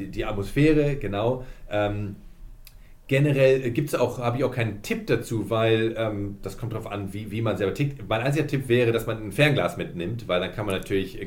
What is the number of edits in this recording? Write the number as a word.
zero